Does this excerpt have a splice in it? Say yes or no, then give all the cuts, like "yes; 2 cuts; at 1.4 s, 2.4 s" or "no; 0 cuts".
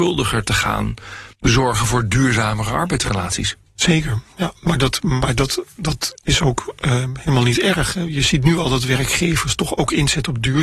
yes; 1 cut; at 1.3 s